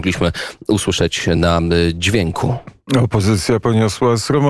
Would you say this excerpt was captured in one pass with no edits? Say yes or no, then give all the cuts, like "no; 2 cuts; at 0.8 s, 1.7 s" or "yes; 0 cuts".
yes; 0 cuts